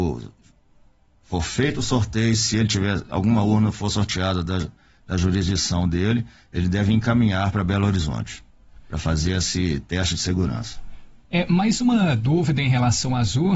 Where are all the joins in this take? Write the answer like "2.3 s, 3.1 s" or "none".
none

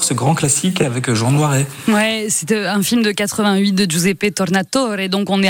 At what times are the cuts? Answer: none

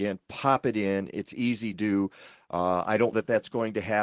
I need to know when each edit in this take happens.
1.7 s, 3.1 s

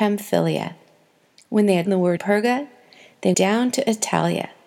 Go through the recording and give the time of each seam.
1.9 s, 2.2 s, 3.3 s

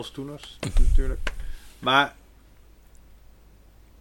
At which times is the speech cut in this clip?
none

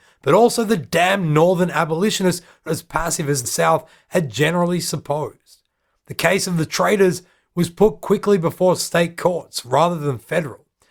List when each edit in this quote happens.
2.7 s, 3.4 s

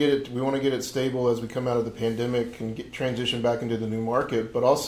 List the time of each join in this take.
none

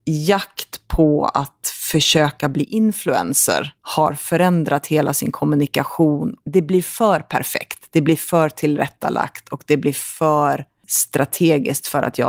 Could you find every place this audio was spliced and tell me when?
3.8 s, 6.4 s

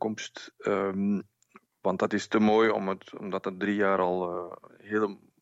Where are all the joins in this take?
none

